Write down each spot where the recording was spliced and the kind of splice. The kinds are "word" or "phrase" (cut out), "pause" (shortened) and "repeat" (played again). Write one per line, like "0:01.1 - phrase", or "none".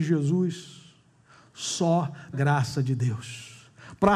0:02.3 - word